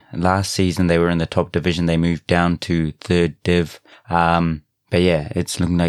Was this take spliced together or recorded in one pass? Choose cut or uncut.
uncut